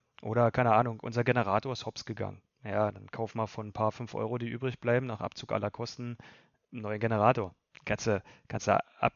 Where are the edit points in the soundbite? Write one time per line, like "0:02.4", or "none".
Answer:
none